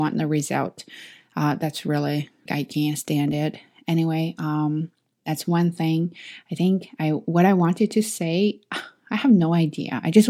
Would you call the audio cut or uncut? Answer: cut